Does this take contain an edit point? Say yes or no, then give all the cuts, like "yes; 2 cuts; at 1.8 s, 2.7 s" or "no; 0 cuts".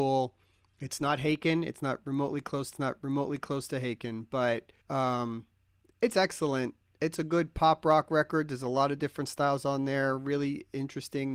yes; 2 cuts; at 2.7 s, 4.8 s